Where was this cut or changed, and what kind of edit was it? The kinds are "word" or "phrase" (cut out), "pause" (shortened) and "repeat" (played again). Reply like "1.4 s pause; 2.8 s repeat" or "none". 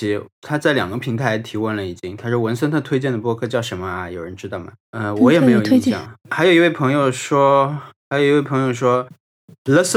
6.2 s pause